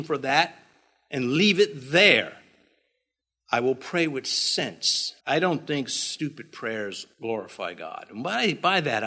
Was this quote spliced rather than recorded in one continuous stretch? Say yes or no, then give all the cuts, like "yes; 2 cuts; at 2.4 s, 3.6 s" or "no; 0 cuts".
yes; 3 cuts; at 3.2 s, 5.2 s, 7.1 s